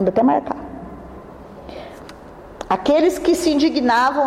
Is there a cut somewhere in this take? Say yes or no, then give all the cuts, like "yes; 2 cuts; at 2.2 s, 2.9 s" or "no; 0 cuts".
no; 0 cuts